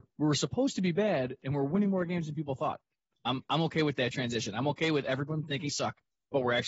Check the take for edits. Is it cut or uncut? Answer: cut